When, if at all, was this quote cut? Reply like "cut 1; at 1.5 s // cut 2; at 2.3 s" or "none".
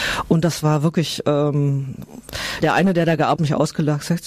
cut 1; at 2.6 s // cut 2; at 3.4 s